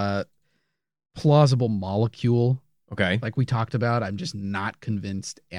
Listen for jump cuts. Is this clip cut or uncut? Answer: uncut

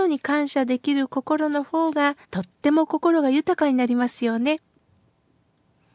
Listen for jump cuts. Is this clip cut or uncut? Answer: cut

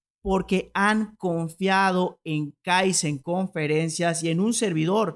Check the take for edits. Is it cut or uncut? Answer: uncut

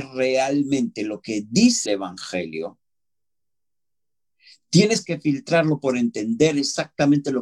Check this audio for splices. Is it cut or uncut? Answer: cut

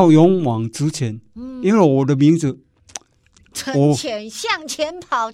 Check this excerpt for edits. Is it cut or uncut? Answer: uncut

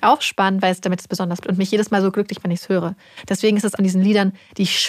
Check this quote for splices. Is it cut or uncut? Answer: cut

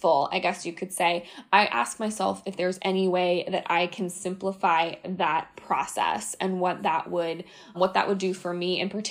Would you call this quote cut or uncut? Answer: cut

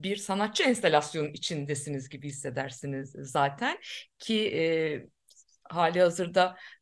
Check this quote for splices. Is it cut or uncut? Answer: uncut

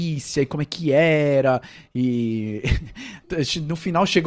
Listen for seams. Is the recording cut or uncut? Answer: uncut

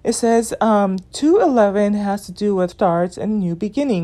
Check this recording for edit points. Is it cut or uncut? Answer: cut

